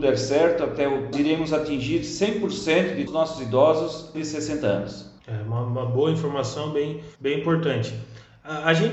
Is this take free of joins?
no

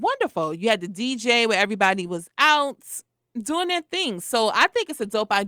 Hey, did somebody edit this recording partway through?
no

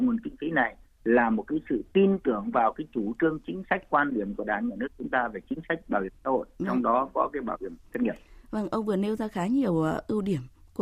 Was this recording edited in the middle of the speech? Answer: no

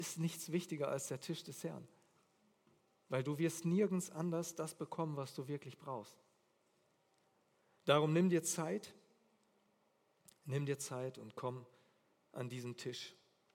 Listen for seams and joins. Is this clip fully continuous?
yes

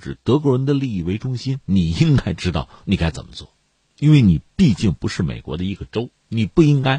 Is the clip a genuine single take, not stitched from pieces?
yes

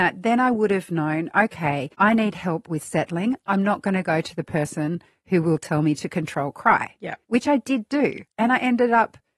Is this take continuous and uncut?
no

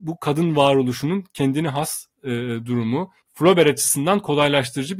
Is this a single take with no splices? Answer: no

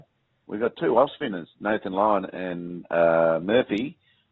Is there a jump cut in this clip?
no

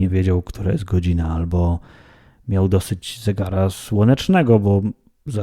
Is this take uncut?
yes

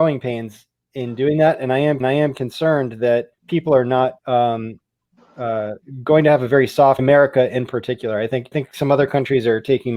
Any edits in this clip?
yes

